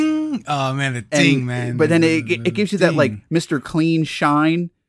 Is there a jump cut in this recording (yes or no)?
no